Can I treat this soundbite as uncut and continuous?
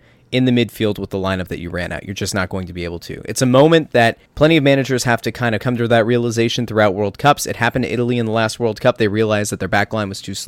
no; 1 cut; at 4.3 s

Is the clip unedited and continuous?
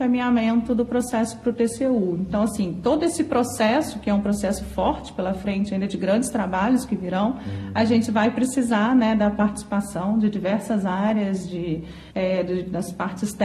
no; 1 cut; at 12.1 s

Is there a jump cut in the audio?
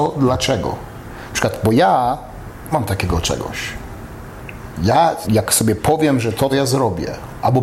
yes; 3 cuts; at 2.7 s, 5.2 s, 6.5 s

